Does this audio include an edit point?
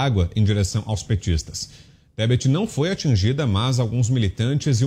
no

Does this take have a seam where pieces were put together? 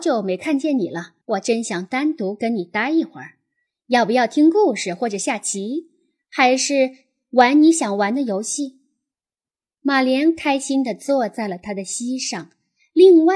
yes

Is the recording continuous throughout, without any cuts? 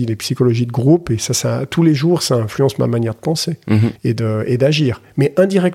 no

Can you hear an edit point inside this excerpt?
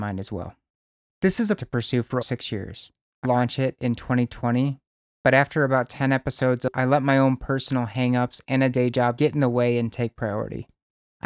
yes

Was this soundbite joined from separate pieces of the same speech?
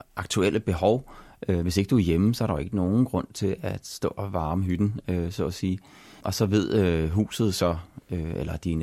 no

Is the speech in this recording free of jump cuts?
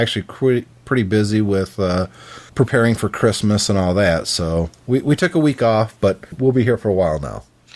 no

